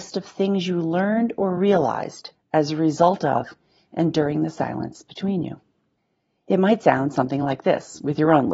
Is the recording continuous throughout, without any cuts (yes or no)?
yes